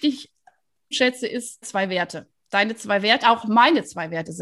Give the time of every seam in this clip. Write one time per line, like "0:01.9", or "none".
0:00.9
0:01.6
0:03.2